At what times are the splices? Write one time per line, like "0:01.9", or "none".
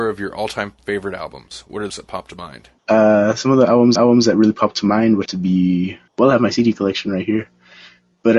0:01.9
0:02.8
0:04.0
0:05.3
0:06.1